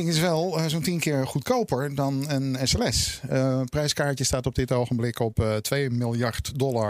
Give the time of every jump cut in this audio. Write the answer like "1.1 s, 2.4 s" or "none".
none